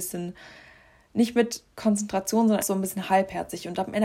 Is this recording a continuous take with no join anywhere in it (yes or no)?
no